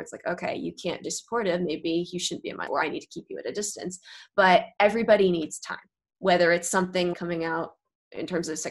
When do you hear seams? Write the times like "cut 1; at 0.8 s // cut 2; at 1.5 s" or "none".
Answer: cut 1; at 1.0 s // cut 2; at 2.7 s // cut 3; at 7.1 s